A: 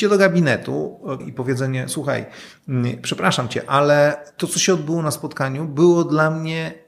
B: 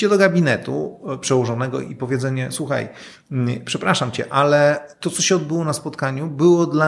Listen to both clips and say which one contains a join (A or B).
A